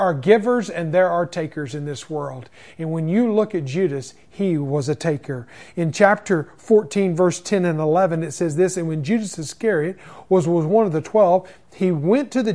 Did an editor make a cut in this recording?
no; 0 cuts

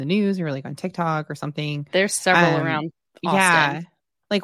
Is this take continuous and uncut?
yes; 0 cuts

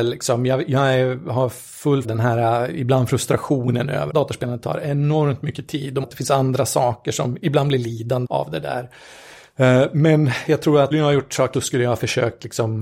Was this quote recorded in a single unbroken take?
no; 6 cuts; at 2.0 s, 4.1 s, 6.0 s, 8.2 s, 10.9 s, 11.5 s

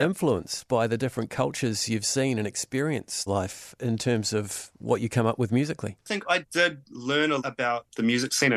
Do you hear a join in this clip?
yes; 4 cuts; at 3.3 s, 6.0 s, 6.4 s, 7.4 s

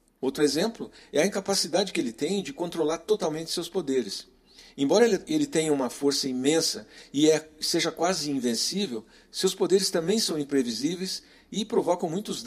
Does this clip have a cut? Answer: no; 0 cuts

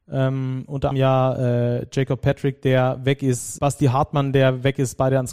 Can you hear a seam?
yes; 2 cuts; at 0.9 s, 3.6 s

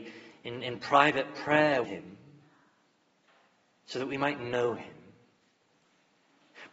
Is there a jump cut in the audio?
yes; 1 cut; at 1.8 s

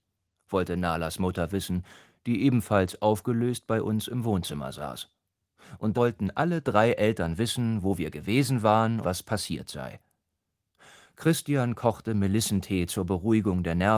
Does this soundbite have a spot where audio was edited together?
yes; 2 cuts; at 5.9 s, 9.0 s

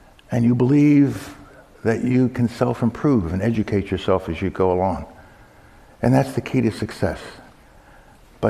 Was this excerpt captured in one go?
yes; 0 cuts

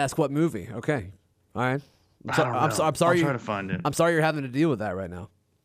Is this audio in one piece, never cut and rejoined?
yes; 0 cuts

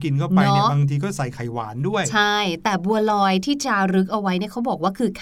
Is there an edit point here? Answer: no; 0 cuts

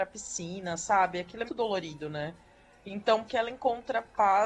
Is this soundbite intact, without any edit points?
no; 2 cuts; at 1.5 s, 3.3 s

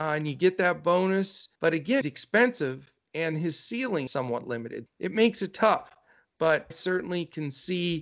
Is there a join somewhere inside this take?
yes; 5 cuts; at 1.6 s, 2.0 s, 4.1 s, 4.9 s, 6.7 s

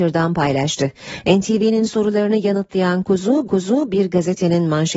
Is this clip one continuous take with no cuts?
no; 1 cut; at 3.5 s

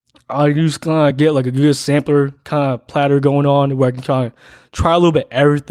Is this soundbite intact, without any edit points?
yes; 0 cuts

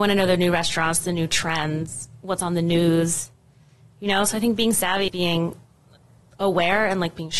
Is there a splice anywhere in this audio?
yes; 1 cut; at 5.1 s

